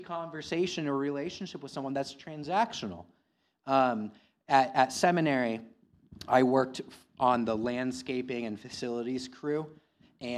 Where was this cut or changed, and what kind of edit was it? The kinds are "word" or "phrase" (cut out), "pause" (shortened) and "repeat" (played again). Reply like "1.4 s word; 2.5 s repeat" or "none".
none